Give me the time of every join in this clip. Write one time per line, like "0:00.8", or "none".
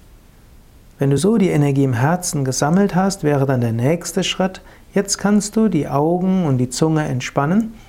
none